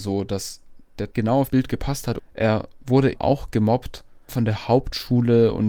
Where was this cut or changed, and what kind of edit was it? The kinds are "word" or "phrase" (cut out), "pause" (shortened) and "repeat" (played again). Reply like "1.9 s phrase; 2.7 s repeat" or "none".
1.1 s word; 1.5 s word; 3.1 s word; 4.3 s word